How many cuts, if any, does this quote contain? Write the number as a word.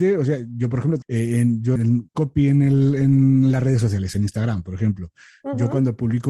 three